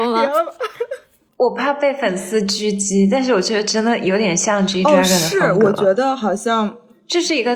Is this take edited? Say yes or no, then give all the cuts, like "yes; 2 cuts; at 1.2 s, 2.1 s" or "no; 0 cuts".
no; 0 cuts